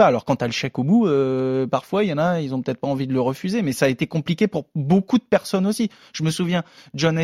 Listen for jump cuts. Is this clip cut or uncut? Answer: uncut